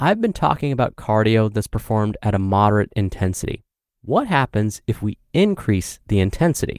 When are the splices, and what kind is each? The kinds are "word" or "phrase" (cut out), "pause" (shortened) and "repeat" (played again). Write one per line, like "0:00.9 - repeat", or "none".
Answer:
none

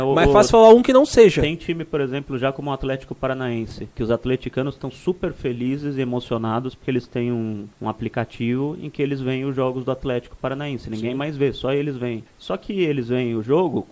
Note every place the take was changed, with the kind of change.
0:03.9 - pause
0:07.7 - pause
0:12.3 - pause

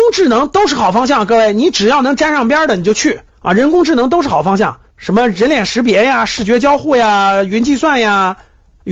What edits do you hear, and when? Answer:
0:03.3 - pause
0:04.9 - pause

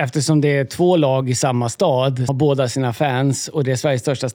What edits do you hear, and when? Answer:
0:02.3 - word

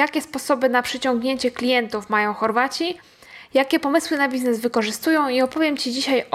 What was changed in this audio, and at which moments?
none

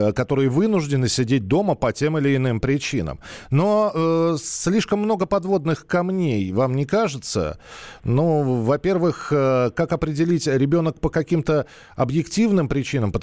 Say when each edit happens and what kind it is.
none

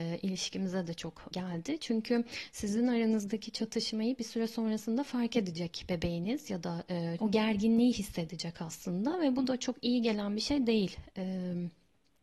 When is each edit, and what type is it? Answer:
0:01.3 - word
0:07.2 - phrase

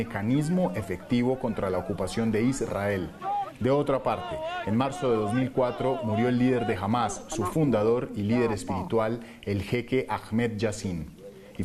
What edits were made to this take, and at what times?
none

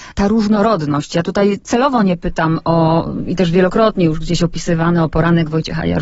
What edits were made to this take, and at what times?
none

